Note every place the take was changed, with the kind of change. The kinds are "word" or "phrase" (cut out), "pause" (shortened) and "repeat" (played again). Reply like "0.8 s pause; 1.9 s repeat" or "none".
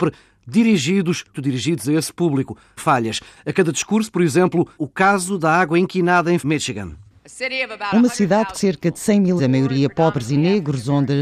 1.3 s word; 2.8 s word; 4.7 s word; 6.4 s word; 8.5 s word; 9.4 s word